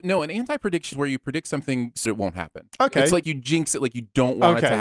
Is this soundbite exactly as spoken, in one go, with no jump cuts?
no; 3 cuts; at 0.9 s, 2.0 s, 3.2 s

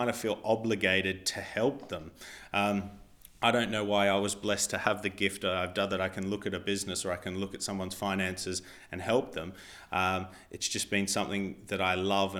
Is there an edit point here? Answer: no; 0 cuts

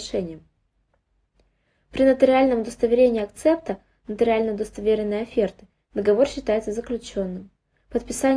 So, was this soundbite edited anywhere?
no; 0 cuts

